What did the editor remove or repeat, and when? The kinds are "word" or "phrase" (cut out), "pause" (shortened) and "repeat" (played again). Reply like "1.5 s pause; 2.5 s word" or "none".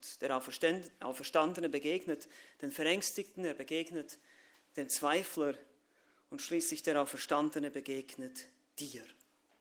none

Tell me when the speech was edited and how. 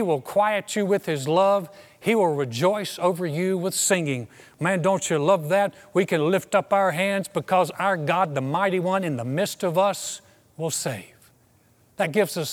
none

